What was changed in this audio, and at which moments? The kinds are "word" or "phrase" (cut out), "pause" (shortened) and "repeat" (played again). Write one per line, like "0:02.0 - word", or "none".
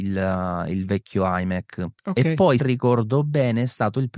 0:02.0 - pause
0:02.6 - word